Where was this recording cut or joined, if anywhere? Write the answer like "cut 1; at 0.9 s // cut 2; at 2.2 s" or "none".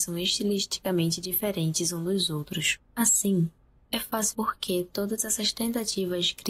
cut 1; at 2.9 s // cut 2; at 4.3 s